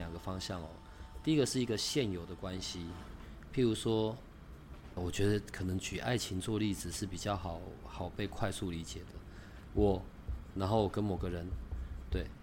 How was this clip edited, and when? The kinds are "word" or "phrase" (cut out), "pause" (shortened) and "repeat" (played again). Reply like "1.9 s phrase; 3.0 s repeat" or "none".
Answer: 5.0 s word